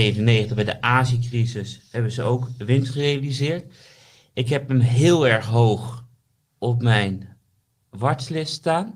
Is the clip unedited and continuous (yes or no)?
yes